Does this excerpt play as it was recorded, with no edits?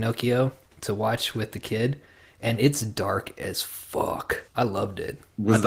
no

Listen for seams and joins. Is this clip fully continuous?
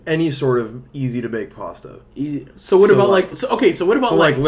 no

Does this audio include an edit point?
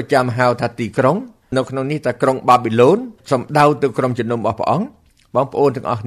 yes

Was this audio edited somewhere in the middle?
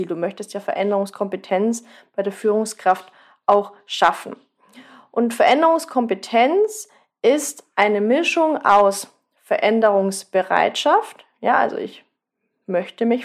no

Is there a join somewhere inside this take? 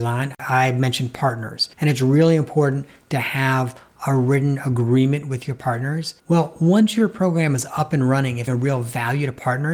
yes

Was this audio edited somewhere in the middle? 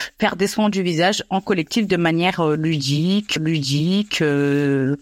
yes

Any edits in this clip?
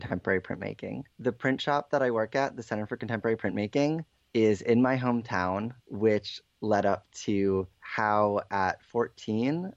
yes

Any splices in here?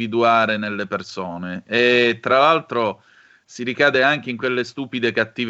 no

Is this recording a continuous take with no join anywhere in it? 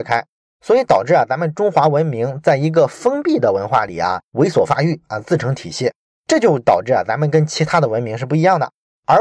yes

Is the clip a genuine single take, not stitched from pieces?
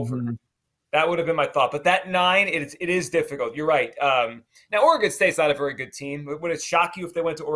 yes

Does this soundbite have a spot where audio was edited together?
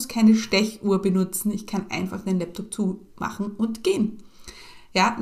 no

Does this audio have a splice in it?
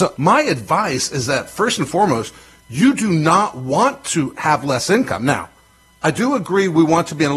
no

